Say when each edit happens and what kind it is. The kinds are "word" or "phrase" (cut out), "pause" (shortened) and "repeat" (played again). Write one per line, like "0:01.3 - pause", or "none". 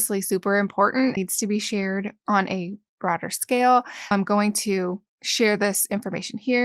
0:01.2 - word
0:04.1 - word
0:05.1 - pause